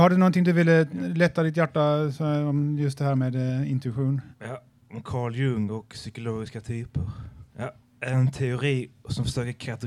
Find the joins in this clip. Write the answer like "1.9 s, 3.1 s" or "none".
4.3 s, 7.5 s